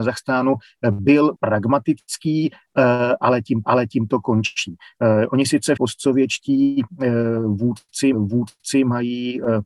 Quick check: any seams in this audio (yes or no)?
yes